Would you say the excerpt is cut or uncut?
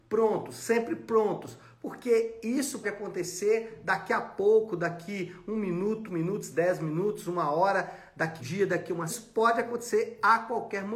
cut